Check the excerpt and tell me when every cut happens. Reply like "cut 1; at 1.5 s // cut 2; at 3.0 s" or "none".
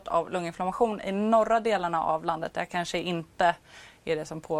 none